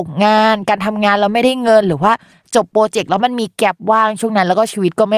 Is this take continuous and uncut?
yes; 0 cuts

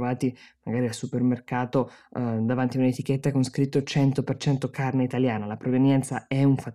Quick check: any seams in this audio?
no; 0 cuts

